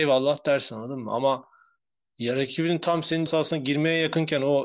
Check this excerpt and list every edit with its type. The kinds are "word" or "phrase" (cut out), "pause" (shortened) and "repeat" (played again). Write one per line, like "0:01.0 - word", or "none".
0:03.3 - word